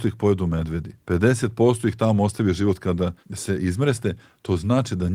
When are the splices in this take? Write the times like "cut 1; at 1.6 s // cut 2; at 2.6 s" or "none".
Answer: cut 1; at 1.0 s // cut 2; at 3.2 s